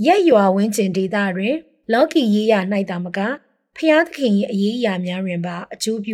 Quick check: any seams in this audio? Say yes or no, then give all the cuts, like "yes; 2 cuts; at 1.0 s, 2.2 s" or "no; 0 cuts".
no; 0 cuts